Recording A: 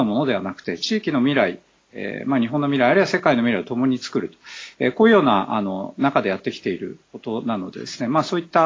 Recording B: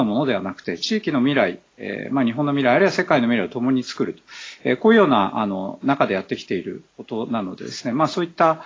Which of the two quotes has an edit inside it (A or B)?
B